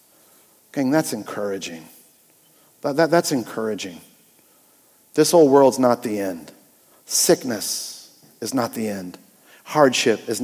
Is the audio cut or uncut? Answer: uncut